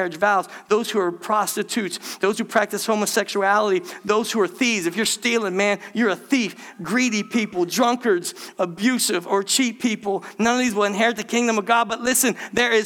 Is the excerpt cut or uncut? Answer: uncut